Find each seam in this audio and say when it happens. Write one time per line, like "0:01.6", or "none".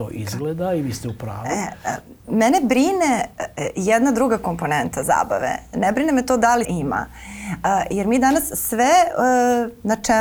0:02.2
0:06.6